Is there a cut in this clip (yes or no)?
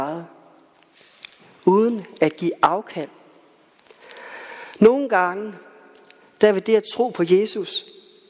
no